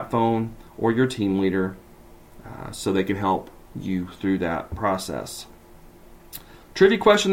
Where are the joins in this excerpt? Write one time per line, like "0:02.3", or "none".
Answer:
none